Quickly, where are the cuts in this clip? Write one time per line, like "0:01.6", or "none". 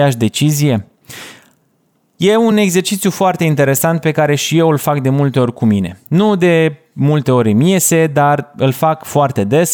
none